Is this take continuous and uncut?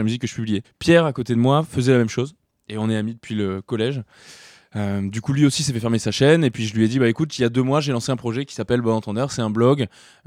yes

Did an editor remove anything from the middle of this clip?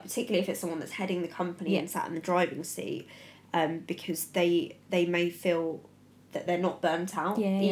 no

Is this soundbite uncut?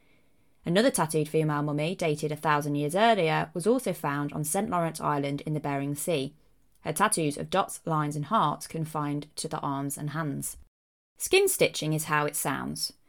yes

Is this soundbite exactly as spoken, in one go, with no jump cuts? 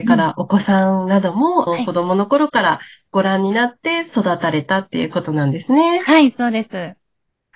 no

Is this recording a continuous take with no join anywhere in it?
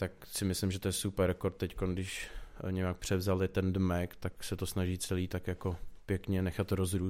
yes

